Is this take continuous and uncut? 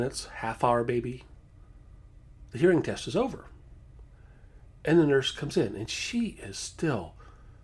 yes; 0 cuts

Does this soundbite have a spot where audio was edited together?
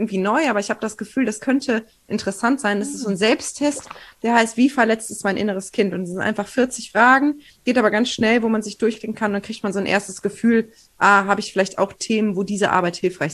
no; 0 cuts

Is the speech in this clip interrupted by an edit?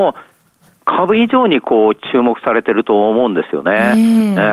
no; 0 cuts

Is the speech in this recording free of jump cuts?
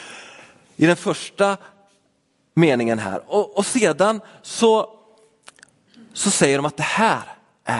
yes; 0 cuts

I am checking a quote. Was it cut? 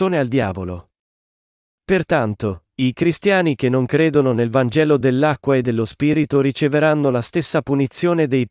no; 0 cuts

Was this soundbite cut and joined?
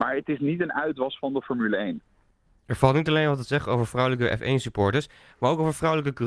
no; 0 cuts

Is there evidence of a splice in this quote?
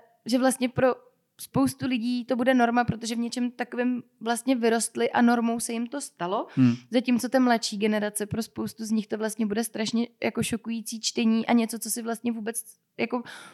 no; 0 cuts

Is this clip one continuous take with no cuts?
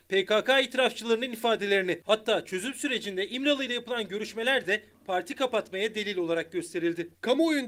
yes; 0 cuts

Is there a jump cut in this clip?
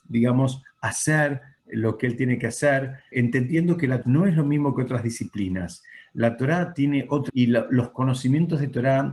yes; 3 cuts; at 3.1 s, 4.0 s, 7.3 s

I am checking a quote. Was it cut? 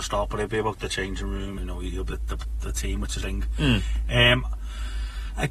yes; 3 cuts; at 1.6 s, 2.1 s, 3.2 s

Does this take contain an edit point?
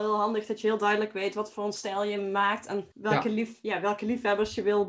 yes; 1 cut; at 2.9 s

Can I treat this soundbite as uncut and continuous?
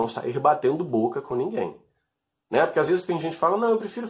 yes; 0 cuts

